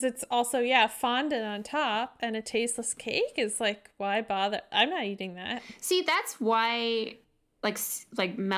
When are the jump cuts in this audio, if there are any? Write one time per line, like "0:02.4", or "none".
none